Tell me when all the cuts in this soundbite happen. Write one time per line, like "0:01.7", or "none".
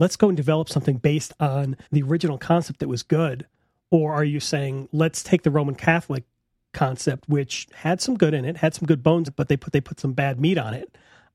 0:01.9
0:09.3
0:09.7